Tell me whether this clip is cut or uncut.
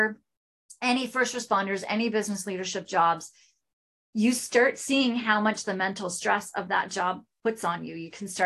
uncut